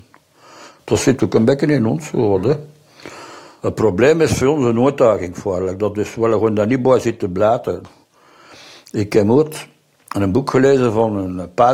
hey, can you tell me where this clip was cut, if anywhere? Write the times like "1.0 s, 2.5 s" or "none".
none